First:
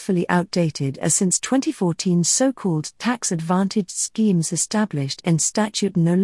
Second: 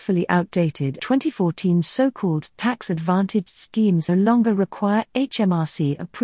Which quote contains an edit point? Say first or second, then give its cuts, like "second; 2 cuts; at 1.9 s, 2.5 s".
second; 2 cuts; at 1.0 s, 4.1 s